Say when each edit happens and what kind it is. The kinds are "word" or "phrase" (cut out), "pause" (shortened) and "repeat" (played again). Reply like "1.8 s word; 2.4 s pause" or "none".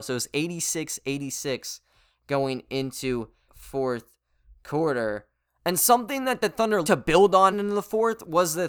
3.5 s word; 6.8 s word; 7.5 s word